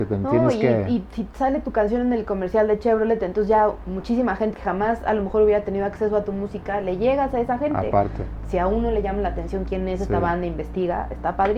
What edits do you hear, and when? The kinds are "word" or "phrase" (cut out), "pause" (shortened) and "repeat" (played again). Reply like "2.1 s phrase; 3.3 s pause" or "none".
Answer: 4.5 s word